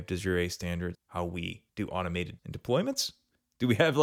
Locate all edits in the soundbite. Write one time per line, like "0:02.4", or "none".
0:00.9
0:01.7
0:02.4